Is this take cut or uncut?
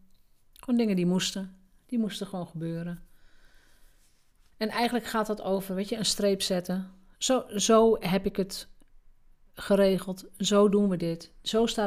uncut